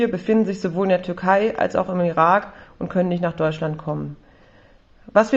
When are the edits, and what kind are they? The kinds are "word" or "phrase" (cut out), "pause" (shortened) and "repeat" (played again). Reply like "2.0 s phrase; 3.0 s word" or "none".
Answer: none